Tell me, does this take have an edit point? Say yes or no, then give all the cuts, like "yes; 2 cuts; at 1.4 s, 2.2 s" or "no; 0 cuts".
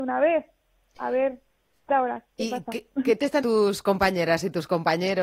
yes; 2 cuts; at 1.9 s, 3.4 s